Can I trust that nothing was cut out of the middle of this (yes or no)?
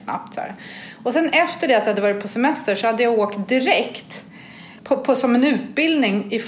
yes